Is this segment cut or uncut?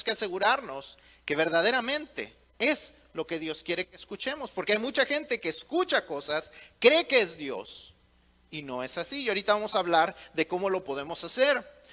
uncut